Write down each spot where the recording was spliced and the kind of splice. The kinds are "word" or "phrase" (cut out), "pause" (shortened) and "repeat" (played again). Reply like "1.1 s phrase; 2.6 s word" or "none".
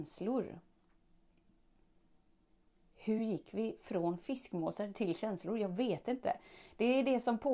none